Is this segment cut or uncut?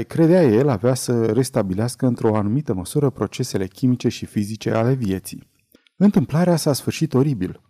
cut